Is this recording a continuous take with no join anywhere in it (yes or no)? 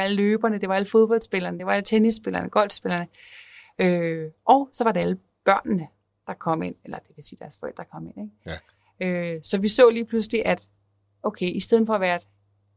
yes